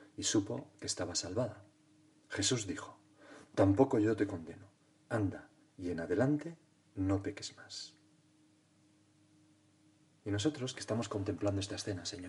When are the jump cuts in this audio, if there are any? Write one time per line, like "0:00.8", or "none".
none